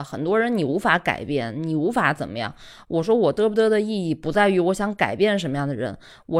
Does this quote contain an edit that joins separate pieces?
no; 0 cuts

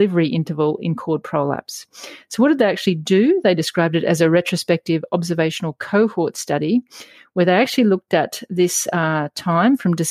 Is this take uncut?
yes; 0 cuts

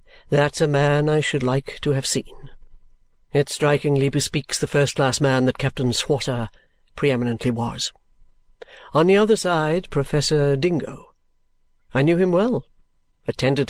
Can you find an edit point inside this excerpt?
no; 0 cuts

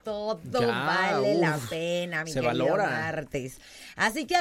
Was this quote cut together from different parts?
no; 0 cuts

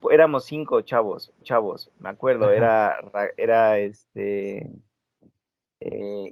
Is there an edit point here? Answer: yes; 1 cut; at 1.4 s

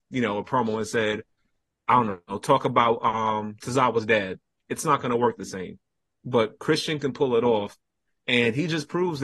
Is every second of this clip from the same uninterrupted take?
yes; 0 cuts

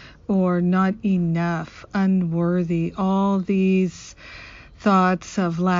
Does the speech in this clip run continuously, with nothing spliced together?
yes; 0 cuts

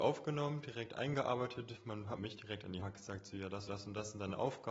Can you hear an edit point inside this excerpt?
yes; 3 cuts; at 2.2 s, 2.8 s, 3.7 s

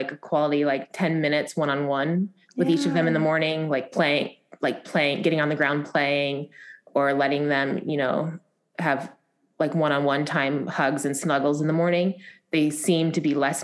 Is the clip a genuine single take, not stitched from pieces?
yes; 0 cuts

